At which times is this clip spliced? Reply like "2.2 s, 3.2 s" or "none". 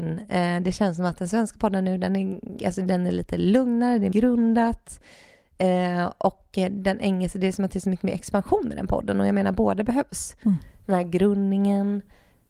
2.6 s, 4.1 s